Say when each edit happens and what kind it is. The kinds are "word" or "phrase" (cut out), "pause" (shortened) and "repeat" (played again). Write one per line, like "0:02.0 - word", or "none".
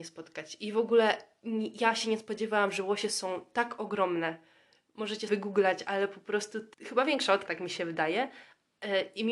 0:05.3 - word
0:06.7 - word
0:07.5 - word